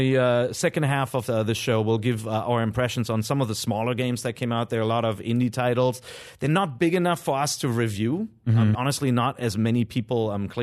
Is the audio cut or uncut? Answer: cut